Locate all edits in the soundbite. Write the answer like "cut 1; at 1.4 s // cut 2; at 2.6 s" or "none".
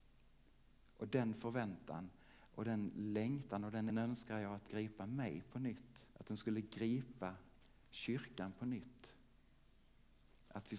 cut 1; at 3.9 s // cut 2; at 4.7 s // cut 3; at 6.1 s